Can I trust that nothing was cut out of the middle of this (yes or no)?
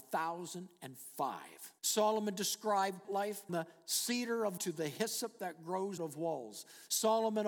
no